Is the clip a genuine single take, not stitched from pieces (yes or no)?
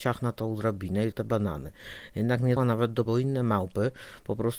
no